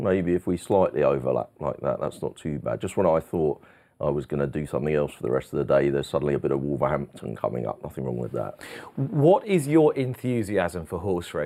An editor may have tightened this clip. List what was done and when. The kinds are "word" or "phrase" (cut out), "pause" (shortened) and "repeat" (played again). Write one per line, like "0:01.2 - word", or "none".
none